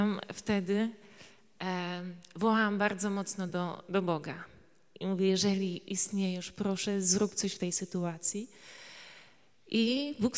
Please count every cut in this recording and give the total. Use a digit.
0